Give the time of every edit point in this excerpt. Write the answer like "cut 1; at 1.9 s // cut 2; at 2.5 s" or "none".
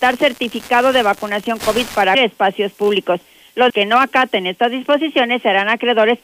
cut 1; at 1.6 s // cut 2; at 2.1 s // cut 3; at 3.7 s